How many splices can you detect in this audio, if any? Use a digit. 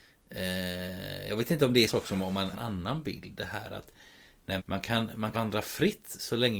4